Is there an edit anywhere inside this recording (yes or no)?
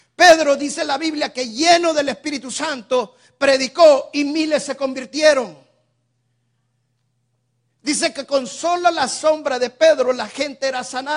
no